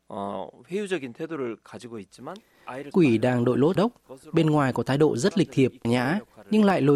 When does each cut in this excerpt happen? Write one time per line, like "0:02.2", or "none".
0:02.9
0:03.8
0:05.8